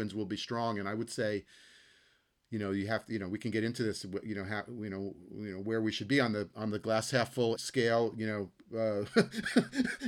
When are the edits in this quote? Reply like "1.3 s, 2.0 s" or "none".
7.6 s